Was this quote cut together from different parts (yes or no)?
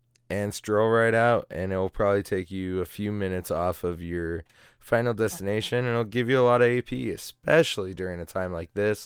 no